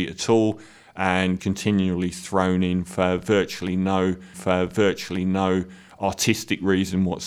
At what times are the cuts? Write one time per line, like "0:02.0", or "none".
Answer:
0:01.4
0:04.3